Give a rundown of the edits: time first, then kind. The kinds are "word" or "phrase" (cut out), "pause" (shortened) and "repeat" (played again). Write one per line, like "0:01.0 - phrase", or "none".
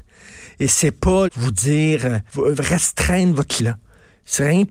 0:01.3 - word
0:02.3 - pause
0:03.6 - word